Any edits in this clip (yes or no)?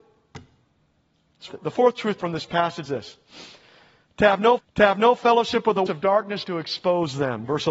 yes